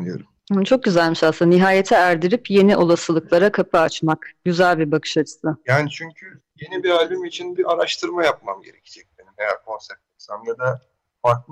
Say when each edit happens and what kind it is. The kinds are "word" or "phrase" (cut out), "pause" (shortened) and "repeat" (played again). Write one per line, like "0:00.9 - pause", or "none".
0:07.6 - word
0:10.1 - pause